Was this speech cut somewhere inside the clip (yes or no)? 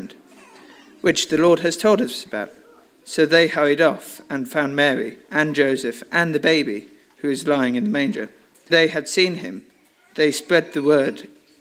yes